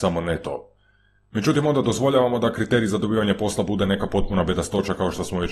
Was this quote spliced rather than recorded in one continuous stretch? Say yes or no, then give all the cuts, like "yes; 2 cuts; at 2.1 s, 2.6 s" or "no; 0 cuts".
no; 0 cuts